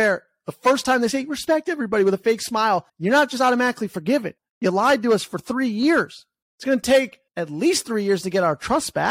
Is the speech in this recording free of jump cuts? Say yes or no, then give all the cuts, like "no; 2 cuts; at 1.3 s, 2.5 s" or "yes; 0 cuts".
no; 4 cuts; at 2.9 s, 4.4 s, 6.4 s, 7.3 s